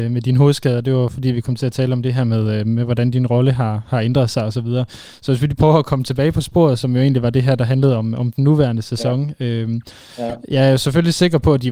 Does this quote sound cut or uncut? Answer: cut